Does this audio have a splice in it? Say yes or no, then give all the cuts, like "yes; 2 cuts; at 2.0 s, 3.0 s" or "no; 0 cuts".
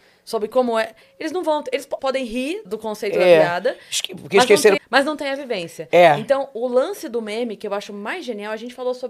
yes; 3 cuts; at 2.0 s, 2.6 s, 4.8 s